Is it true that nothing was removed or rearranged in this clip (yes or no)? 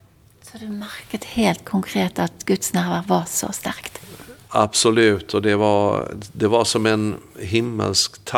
yes